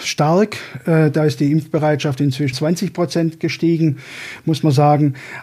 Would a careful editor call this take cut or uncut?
cut